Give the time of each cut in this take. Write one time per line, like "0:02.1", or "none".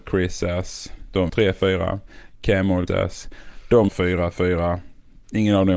0:01.3
0:02.9
0:03.9

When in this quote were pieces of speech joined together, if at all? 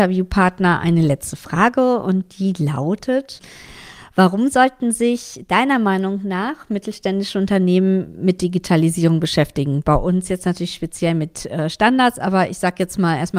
none

